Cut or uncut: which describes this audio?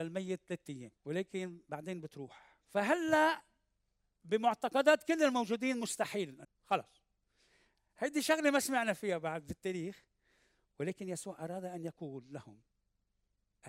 cut